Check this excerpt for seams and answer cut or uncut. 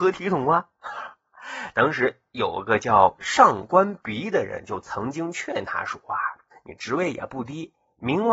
cut